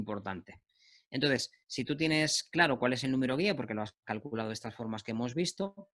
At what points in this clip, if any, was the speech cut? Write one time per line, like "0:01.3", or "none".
none